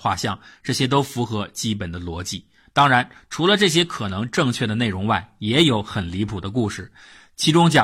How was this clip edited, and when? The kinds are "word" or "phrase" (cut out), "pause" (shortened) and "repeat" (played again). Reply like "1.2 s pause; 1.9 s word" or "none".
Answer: none